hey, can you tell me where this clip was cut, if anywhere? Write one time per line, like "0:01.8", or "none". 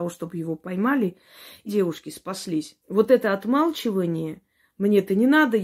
0:01.7
0:02.8